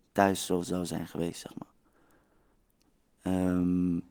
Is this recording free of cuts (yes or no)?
yes